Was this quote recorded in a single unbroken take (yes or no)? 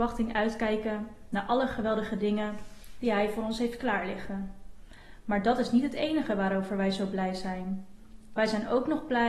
yes